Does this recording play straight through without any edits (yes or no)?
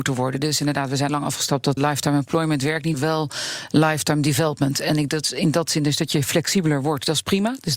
no